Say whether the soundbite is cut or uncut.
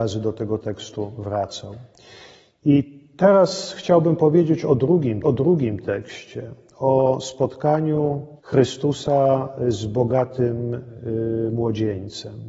cut